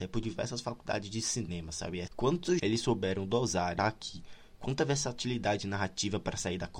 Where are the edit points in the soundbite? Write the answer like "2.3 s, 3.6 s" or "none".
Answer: 2.1 s, 2.6 s, 3.8 s